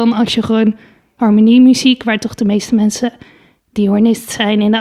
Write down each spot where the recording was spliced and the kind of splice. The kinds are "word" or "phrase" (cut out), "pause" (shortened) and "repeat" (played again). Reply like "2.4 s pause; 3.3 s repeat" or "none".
none